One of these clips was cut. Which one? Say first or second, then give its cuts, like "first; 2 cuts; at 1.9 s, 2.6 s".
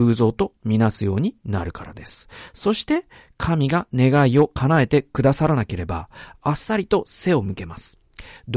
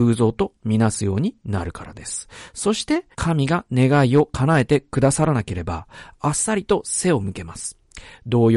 second; 1 cut; at 3.1 s